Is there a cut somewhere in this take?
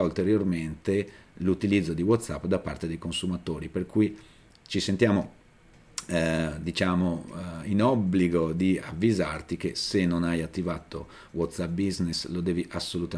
no; 0 cuts

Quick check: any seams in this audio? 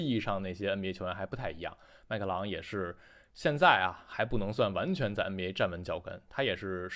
no; 0 cuts

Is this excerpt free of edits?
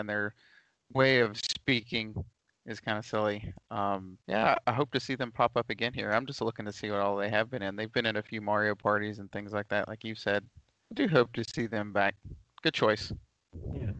no; 1 cut; at 4.2 s

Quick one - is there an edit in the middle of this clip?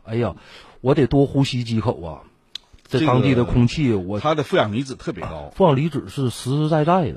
no; 0 cuts

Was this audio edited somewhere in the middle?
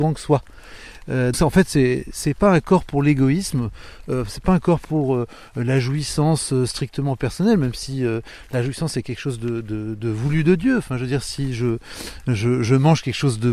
yes; 1 cut; at 1.3 s

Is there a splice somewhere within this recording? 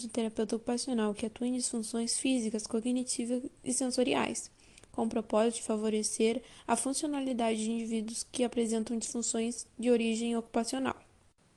no; 0 cuts

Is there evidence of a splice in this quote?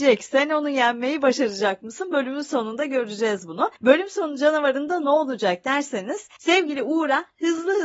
yes; 2 cuts; at 3.8 s, 6.4 s

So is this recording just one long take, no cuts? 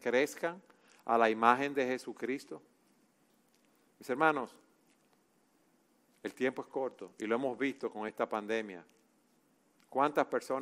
yes; 0 cuts

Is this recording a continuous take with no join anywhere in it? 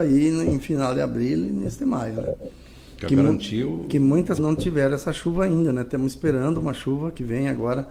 no; 1 cut; at 4.4 s

